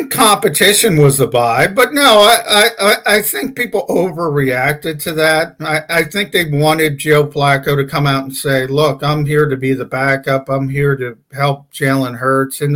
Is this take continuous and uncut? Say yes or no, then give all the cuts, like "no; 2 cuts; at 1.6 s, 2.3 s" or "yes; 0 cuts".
yes; 0 cuts